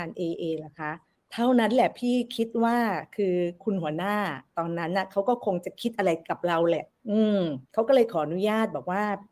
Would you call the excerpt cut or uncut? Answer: cut